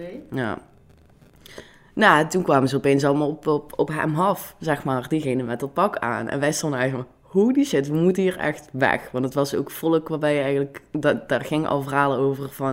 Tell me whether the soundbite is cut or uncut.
uncut